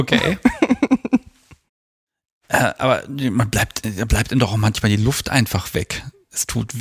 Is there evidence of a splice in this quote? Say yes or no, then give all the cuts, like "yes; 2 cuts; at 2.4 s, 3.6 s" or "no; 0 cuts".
no; 0 cuts